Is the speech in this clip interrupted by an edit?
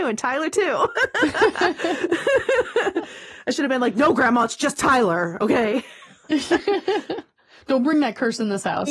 no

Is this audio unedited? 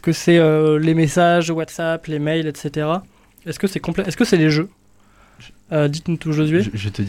yes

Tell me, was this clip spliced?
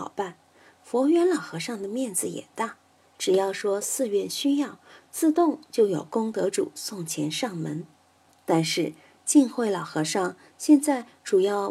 no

